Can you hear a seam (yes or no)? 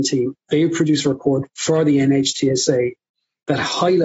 no